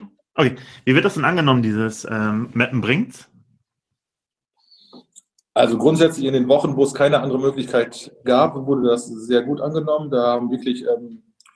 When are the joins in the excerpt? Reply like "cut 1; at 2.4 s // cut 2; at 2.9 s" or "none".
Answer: none

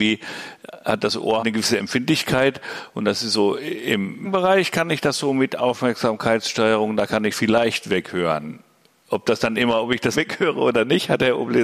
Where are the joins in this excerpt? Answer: cut 1; at 1.4 s // cut 2; at 4.2 s // cut 3; at 7.3 s // cut 4; at 10.1 s

